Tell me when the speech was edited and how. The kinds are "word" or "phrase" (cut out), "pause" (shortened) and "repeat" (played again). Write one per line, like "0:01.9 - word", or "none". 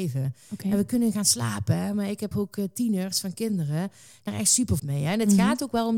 0:02.3 - word
0:04.3 - word
0:04.8 - word